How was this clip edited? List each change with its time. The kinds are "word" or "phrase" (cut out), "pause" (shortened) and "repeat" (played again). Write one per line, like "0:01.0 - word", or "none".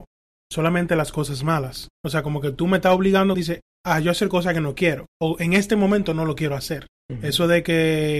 0:01.9 - pause
0:03.3 - phrase
0:03.7 - pause
0:05.1 - pause
0:07.0 - pause